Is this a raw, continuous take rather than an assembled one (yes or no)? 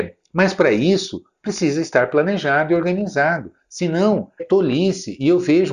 no